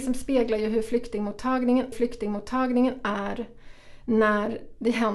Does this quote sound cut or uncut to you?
cut